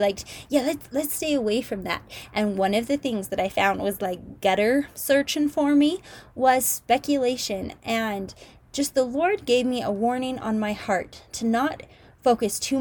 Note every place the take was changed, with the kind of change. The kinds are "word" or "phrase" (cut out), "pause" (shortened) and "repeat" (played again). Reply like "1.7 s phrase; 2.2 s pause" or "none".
none